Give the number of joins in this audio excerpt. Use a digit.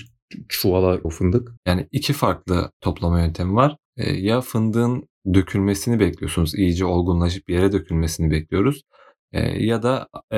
4